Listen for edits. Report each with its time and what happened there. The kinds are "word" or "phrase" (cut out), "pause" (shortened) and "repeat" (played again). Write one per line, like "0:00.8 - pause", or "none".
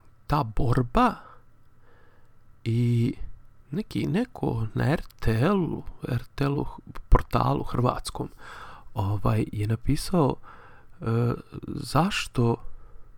none